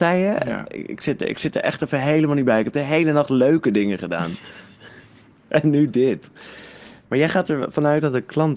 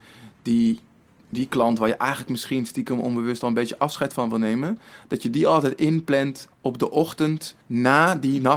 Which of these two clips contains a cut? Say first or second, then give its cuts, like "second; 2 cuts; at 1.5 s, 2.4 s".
second; 2 cuts; at 6.5 s, 7.6 s